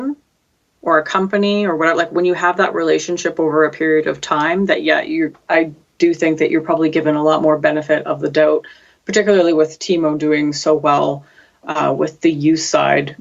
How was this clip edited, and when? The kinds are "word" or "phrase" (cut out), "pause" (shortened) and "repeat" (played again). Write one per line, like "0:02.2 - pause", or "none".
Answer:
none